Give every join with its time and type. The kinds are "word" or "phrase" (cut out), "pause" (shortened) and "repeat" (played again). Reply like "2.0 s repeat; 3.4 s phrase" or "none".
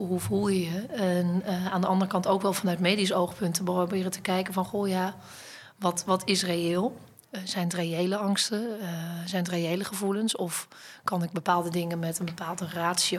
none

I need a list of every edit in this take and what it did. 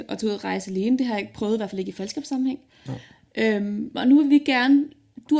none

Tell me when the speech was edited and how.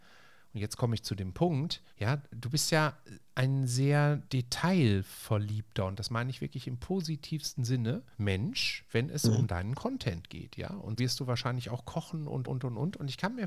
1.9 s pause; 4.3 s pause; 8.1 s pause; 11.0 s word; 12.4 s repeat

